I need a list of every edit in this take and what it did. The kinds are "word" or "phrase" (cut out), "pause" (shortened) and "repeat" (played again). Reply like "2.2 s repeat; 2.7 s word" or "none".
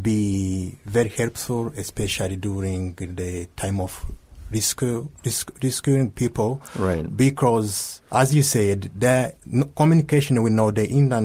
8.1 s pause; 9.4 s pause